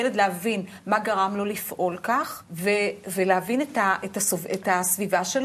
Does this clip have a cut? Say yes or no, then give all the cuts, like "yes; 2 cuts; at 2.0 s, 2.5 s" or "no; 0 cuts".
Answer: yes; 1 cut; at 2.5 s